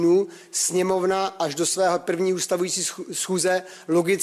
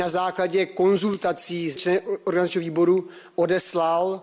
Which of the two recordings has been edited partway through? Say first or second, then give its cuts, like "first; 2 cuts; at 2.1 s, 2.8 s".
second; 1 cut; at 1.8 s